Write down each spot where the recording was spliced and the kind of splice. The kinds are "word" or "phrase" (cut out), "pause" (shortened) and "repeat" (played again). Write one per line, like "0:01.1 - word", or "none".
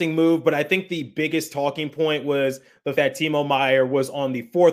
0:02.9 - word

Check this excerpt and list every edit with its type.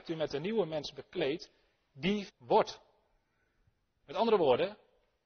0:02.3 - word

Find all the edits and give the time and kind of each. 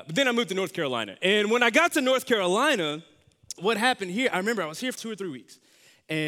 0:03.6 - word
0:04.9 - word

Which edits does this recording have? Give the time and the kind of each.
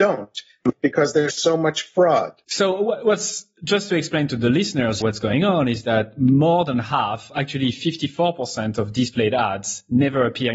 0:02.4 - pause
0:05.0 - word

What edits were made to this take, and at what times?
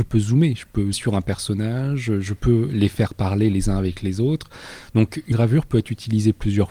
0:00.9 - word
0:05.3 - word

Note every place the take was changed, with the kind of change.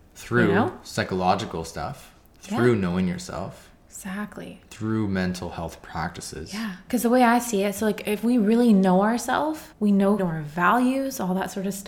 0:09.7 - pause
0:10.2 - phrase

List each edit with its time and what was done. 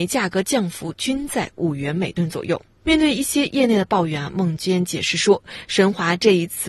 0:02.7 - pause

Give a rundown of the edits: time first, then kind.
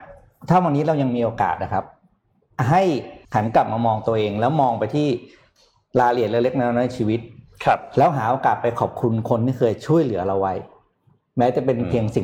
0:03.2 - pause

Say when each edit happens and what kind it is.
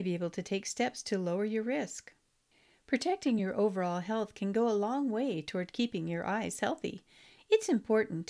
none

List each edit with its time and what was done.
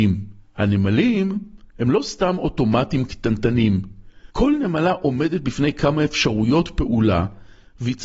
0:04.3 - pause

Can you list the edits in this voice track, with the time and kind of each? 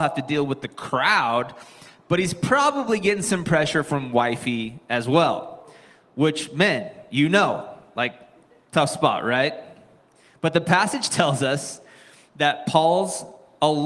none

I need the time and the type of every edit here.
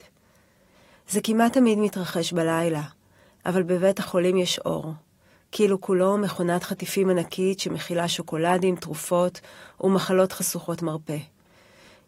none

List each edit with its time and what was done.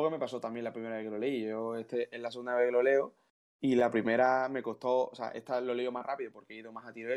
none

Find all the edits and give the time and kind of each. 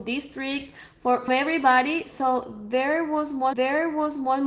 0:01.3 - word
0:03.5 - repeat

